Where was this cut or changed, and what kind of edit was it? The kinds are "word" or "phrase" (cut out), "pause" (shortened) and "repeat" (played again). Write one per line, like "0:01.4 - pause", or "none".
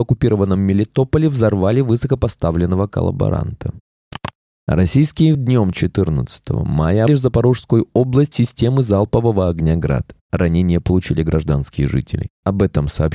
0:05.3 - word
0:07.1 - word
0:08.3 - word